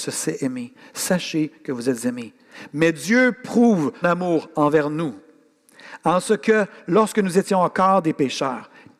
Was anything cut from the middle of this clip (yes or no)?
yes